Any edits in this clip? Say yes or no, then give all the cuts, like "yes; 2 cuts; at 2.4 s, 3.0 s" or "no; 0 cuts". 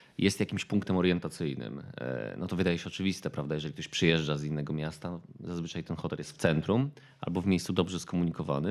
no; 0 cuts